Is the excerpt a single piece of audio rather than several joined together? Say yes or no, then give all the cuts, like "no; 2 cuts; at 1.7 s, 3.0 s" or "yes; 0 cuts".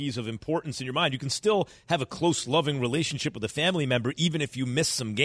yes; 0 cuts